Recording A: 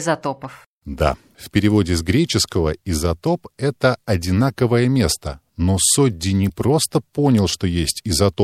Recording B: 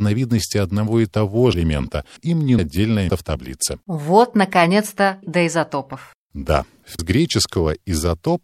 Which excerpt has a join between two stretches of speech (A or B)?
B